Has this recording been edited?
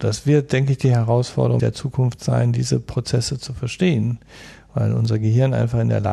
yes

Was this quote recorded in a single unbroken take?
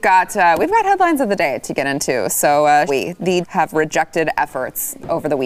no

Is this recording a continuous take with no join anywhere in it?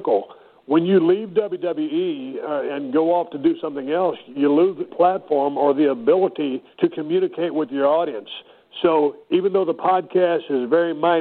no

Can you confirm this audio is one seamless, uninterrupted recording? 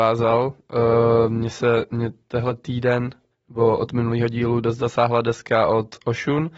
yes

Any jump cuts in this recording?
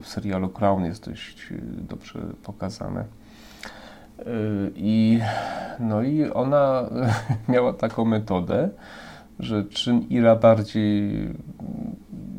no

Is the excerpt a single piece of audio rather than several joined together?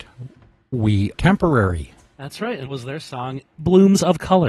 no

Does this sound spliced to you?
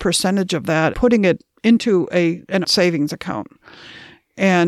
yes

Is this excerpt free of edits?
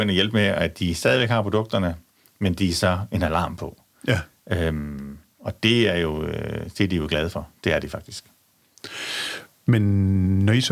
yes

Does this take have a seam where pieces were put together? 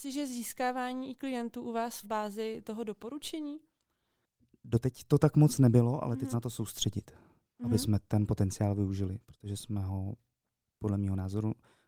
yes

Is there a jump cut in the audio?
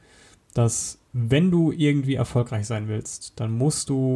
yes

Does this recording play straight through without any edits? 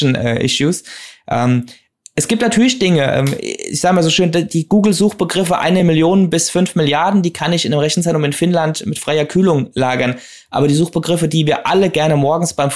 yes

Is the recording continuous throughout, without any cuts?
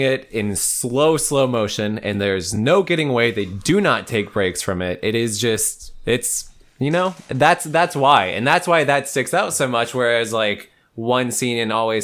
yes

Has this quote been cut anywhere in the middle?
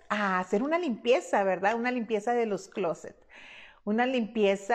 no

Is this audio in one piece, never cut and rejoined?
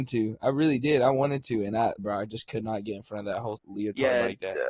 no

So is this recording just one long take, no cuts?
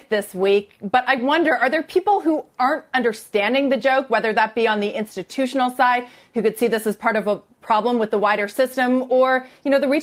yes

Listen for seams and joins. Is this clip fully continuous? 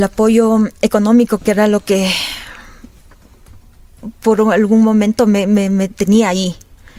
yes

